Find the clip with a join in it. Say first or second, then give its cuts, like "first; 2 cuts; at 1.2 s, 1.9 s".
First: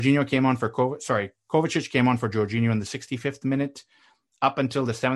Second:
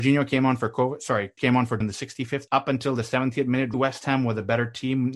second; 4 cuts; at 1.4 s, 1.8 s, 2.5 s, 3.7 s